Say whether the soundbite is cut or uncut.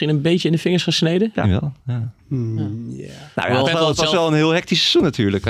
cut